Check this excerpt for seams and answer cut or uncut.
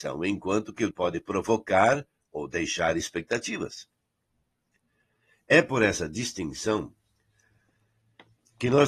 cut